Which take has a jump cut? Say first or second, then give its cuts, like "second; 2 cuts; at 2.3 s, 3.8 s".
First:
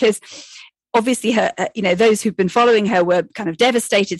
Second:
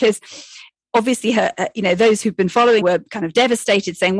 second; 1 cut; at 2.8 s